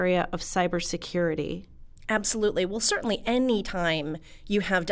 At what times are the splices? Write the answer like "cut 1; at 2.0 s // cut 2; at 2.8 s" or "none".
none